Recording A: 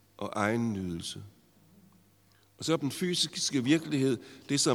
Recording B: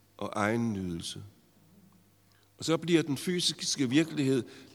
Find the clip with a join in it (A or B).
A